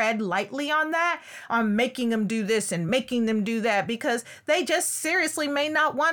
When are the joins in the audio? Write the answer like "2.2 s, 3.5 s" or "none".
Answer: none